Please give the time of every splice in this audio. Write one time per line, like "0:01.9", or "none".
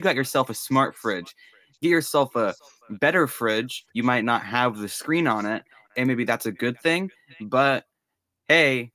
0:03.9